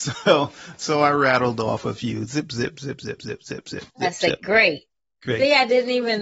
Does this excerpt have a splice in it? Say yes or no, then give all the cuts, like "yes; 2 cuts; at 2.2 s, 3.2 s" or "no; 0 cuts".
yes; 2 cuts; at 3.2 s, 3.9 s